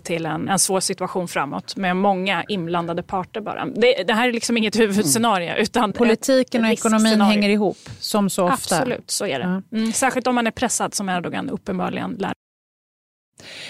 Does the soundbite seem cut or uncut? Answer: cut